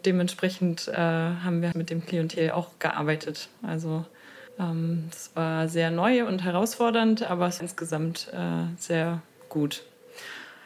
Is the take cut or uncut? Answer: cut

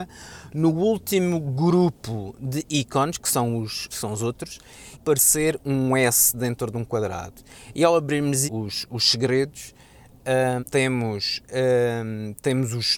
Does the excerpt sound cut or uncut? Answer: cut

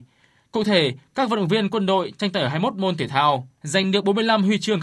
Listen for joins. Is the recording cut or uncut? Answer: uncut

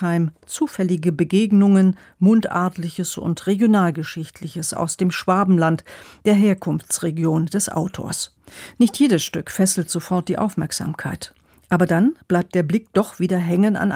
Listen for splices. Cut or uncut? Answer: uncut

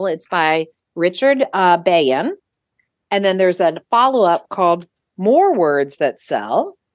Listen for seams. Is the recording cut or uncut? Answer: uncut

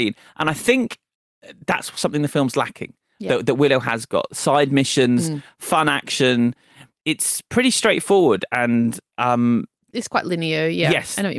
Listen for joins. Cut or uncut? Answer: uncut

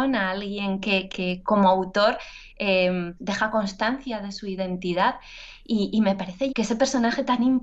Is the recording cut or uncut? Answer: cut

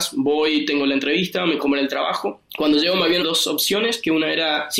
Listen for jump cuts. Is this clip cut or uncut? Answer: cut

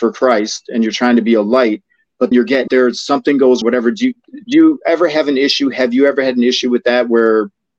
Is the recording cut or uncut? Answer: cut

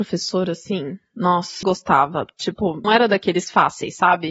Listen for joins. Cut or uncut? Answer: cut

